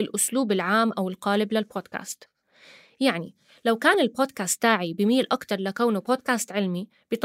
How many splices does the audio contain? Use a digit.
0